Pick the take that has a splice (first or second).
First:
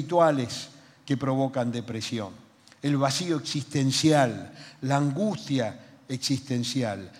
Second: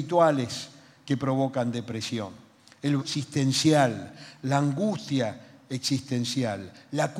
second